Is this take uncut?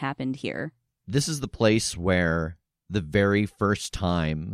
yes; 0 cuts

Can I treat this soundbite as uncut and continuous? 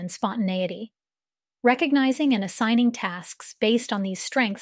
yes; 0 cuts

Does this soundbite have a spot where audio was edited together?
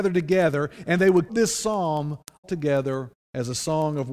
yes; 2 cuts; at 1.3 s, 2.4 s

